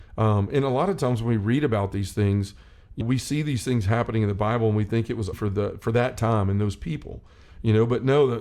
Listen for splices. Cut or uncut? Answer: cut